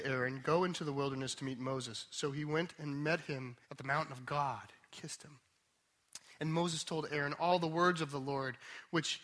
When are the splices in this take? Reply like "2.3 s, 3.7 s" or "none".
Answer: 3.6 s, 4.9 s